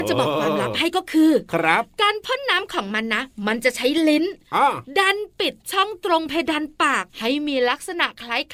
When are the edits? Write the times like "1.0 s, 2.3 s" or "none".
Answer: 7.1 s